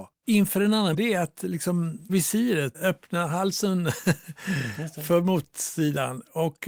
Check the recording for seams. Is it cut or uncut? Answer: cut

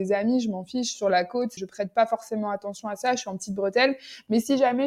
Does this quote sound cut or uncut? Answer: cut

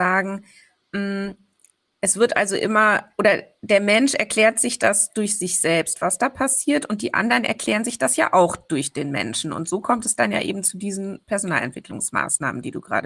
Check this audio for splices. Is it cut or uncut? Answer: uncut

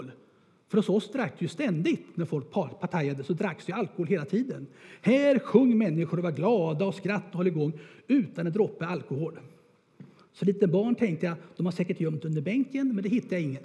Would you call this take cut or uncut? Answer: uncut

